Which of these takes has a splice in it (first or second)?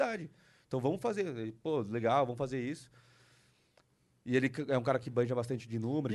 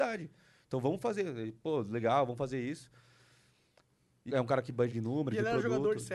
second